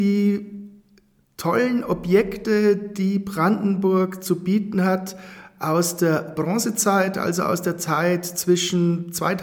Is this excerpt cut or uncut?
uncut